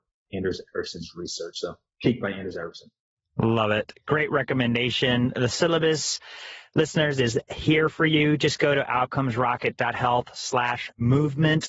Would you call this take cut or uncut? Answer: uncut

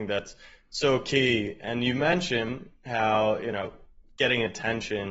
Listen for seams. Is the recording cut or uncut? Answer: uncut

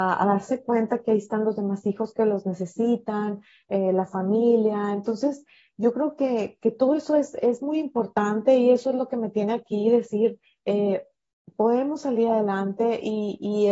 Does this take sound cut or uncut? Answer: uncut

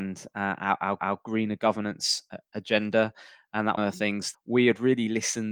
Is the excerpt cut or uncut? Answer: cut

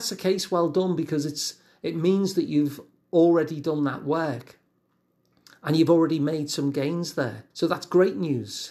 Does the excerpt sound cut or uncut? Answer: cut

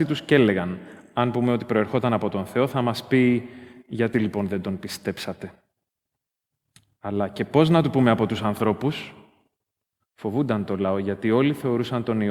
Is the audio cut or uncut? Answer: uncut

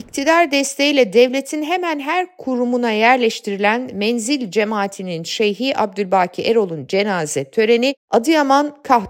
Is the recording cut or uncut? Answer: uncut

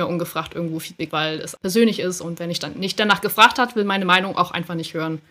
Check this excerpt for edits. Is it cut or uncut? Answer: cut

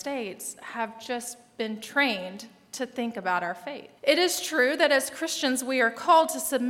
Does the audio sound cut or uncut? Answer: cut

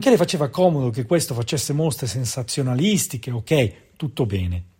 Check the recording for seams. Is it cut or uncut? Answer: uncut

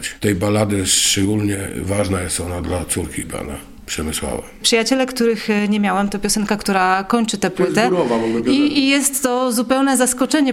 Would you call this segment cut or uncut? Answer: uncut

